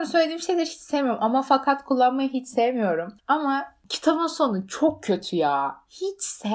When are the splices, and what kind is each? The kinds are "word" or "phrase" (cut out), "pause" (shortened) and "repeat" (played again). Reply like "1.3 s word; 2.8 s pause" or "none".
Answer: 3.2 s pause